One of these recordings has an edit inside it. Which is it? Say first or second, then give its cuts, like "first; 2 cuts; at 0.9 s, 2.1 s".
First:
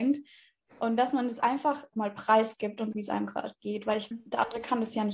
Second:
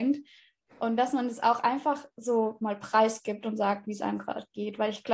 first; 4 cuts; at 1.4 s, 1.9 s, 2.9 s, 4.1 s